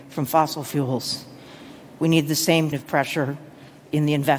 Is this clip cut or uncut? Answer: cut